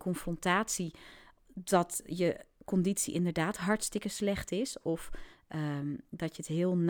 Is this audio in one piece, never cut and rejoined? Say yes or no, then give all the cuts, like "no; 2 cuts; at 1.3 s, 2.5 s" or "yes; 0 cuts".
yes; 0 cuts